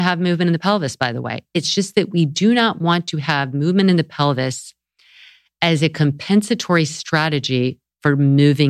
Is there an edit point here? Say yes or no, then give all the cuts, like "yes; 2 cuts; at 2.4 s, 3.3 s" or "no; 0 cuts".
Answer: no; 0 cuts